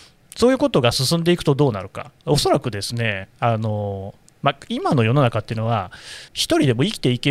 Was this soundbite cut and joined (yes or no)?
yes